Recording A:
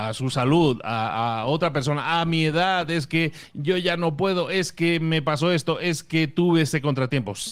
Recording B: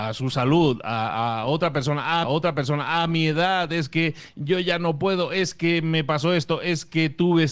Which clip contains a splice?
B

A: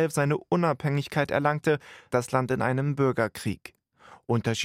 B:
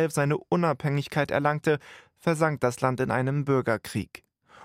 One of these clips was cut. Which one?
A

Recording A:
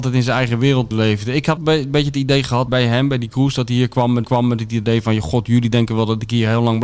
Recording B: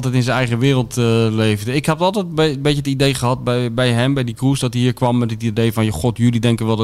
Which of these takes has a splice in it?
A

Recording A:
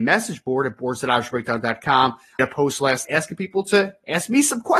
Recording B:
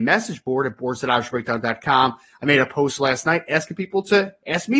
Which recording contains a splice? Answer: A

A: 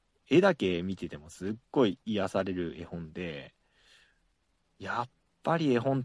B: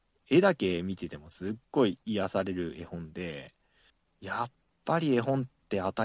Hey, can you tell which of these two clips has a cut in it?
B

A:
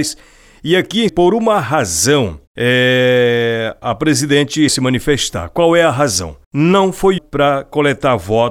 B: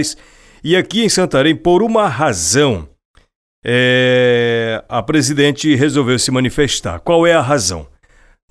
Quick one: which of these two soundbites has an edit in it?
A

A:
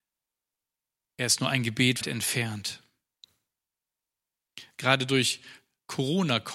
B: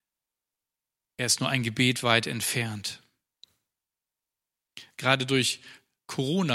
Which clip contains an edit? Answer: A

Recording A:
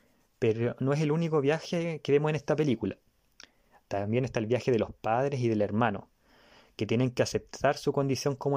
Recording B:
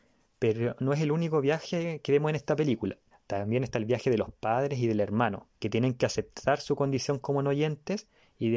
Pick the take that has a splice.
B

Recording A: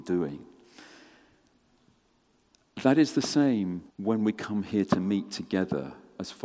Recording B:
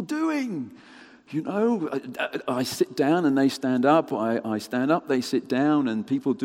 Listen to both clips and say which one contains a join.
A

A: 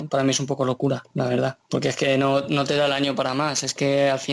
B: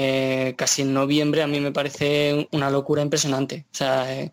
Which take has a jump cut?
A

